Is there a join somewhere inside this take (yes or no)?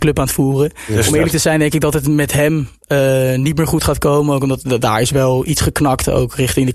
no